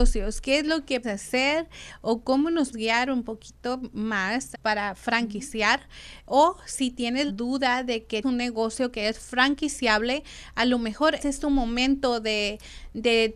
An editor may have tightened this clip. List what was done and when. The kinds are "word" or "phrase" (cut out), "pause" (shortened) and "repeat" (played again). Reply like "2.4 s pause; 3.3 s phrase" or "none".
1.0 s word; 2.7 s word; 4.5 s word; 7.3 s word; 8.2 s word; 11.2 s word